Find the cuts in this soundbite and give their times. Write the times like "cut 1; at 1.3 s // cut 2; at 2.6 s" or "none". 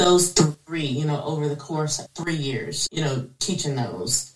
cut 1; at 2.1 s // cut 2; at 2.9 s